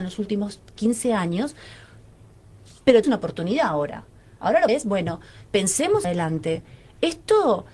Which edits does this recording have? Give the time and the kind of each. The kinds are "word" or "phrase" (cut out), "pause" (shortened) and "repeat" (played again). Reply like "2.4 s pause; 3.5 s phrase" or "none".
3.0 s word; 4.7 s word; 6.0 s word